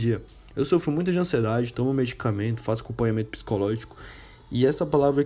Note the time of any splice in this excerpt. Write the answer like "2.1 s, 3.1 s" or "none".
none